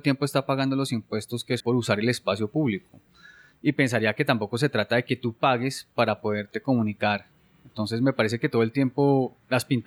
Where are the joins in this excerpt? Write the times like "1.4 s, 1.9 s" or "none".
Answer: 1.6 s